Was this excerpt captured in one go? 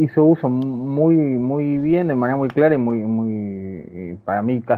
yes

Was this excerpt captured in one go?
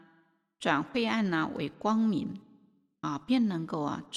yes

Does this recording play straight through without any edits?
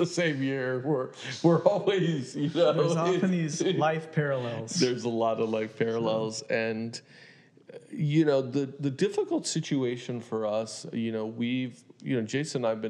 yes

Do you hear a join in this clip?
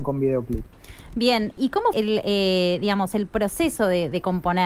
yes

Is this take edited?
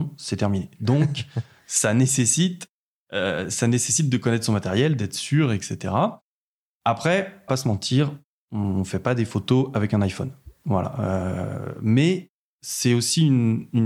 yes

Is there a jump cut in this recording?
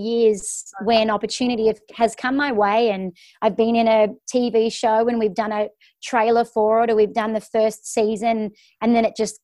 no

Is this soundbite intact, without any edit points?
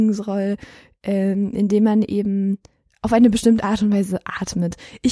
yes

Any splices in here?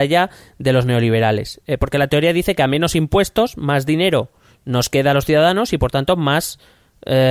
no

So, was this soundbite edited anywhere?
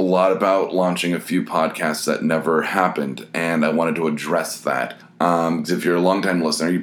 yes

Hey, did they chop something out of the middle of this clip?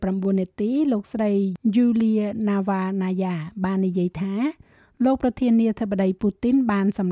no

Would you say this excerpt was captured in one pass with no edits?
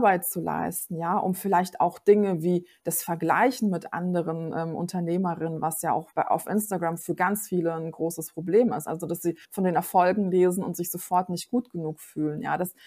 no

